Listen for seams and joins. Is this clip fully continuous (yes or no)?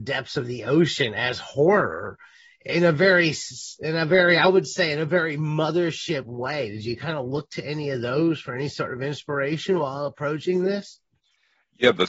yes